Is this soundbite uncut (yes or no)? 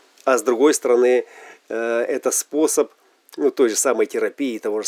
yes